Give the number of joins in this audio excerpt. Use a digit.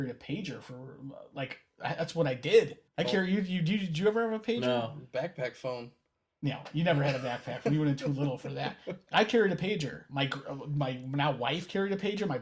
1